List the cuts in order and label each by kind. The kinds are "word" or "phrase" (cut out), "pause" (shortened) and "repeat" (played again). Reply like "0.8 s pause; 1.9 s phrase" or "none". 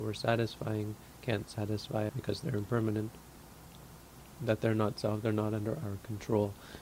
2.1 s word; 4.4 s word